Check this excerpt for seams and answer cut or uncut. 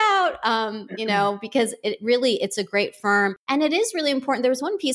cut